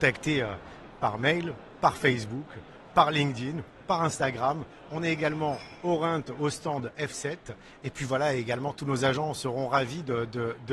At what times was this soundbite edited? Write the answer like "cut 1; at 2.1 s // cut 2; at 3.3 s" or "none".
none